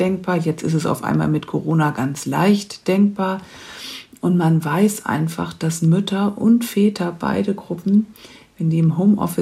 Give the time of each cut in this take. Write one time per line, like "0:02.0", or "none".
none